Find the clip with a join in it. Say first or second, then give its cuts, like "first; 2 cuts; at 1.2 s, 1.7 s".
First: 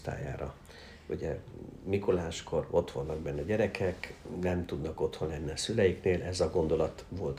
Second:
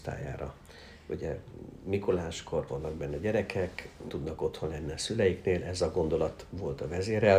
second; 2 cuts; at 2.7 s, 4.1 s